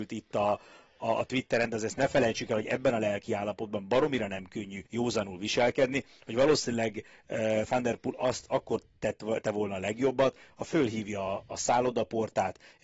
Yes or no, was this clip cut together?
yes